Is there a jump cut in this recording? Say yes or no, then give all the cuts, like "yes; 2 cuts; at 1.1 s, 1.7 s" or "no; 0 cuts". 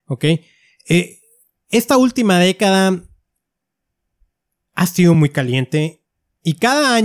no; 0 cuts